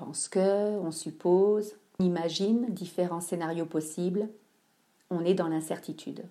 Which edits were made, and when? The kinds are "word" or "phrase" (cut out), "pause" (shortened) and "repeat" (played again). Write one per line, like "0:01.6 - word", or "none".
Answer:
0:02.0 - word